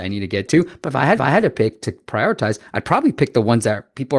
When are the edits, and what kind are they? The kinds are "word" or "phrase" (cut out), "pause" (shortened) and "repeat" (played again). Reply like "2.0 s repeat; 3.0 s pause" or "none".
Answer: 1.2 s repeat